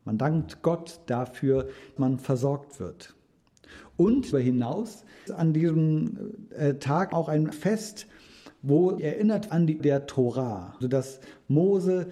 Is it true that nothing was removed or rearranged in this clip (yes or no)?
no